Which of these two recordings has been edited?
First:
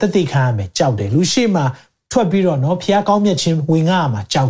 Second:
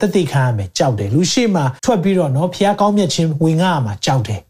second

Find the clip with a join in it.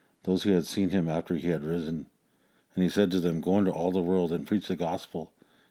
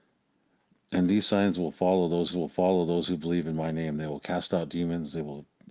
second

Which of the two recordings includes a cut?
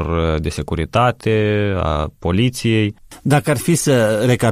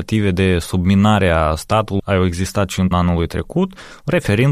second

